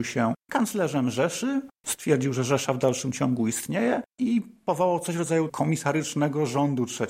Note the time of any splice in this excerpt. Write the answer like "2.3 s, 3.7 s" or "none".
5.5 s